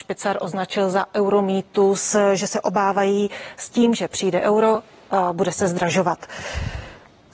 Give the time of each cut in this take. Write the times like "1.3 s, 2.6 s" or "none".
none

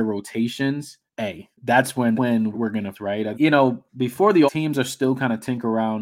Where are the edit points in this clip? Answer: 1.1 s, 1.5 s, 2.1 s, 2.5 s, 2.9 s, 3.3 s, 3.9 s, 4.5 s

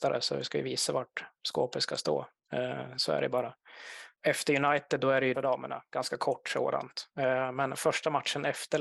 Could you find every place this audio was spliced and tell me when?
4.1 s, 5.3 s

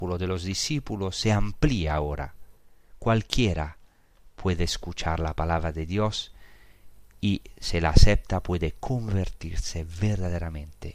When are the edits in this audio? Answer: none

